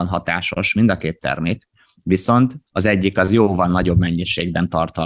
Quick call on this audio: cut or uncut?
cut